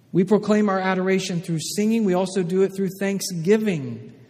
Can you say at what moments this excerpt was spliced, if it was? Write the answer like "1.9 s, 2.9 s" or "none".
none

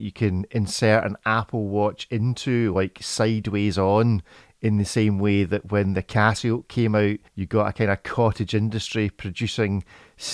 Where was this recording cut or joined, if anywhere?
none

